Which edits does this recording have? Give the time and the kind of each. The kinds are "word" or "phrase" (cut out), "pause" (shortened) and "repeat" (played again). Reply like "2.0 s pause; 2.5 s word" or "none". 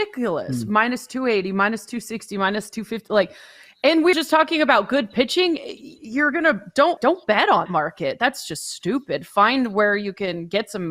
4.1 s word; 7.0 s word; 7.7 s word